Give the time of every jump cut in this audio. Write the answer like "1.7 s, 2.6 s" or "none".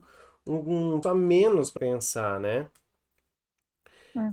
1.0 s, 1.8 s